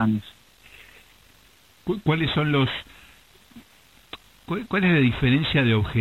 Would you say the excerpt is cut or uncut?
uncut